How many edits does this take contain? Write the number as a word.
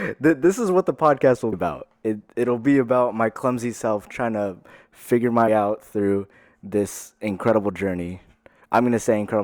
two